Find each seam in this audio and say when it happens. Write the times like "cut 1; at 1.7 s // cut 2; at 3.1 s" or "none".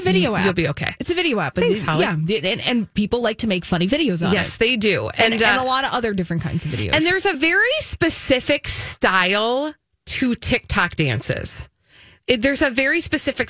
none